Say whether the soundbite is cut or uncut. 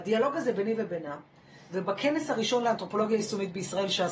uncut